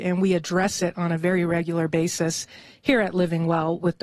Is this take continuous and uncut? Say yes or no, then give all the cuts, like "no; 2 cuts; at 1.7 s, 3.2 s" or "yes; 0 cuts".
yes; 0 cuts